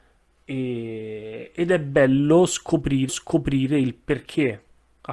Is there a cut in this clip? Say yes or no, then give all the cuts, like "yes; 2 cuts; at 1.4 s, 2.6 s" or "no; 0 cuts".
yes; 1 cut; at 3.1 s